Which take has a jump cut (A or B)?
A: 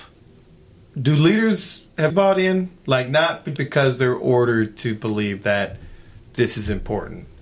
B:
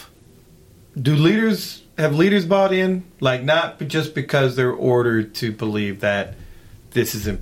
A